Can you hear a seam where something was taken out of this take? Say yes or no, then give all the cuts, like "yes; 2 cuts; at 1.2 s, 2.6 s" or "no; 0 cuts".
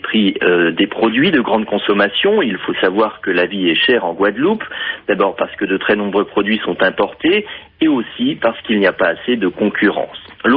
no; 0 cuts